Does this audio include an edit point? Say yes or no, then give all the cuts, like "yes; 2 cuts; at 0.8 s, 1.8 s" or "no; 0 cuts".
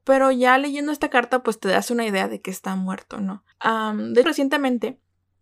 yes; 2 cuts; at 3.5 s, 4.2 s